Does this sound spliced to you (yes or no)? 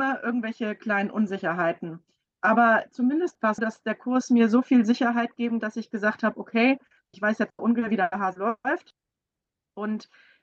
yes